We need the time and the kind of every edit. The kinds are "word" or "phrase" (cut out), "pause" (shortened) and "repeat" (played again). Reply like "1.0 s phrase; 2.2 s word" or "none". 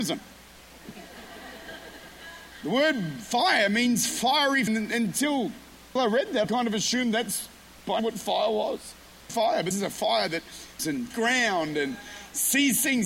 4.7 s word; 6.0 s word; 6.4 s word; 8.0 s word; 9.3 s word; 9.7 s word; 10.8 s word; 11.1 s word

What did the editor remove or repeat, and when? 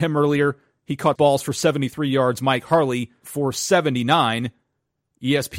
1.2 s word; 3.2 s word

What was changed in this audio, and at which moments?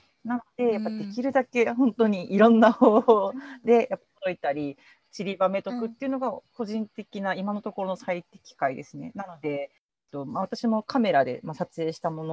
none

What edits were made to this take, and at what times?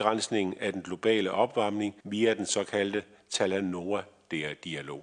2.0 s pause

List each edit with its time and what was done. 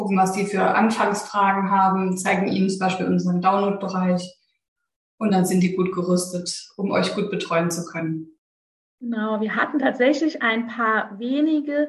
none

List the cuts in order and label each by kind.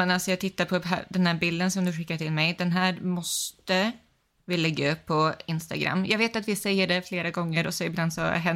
none

